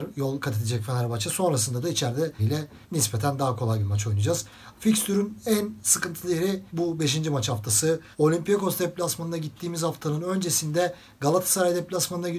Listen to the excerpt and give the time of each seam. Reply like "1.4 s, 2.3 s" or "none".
2.4 s, 2.8 s, 6.7 s, 8.1 s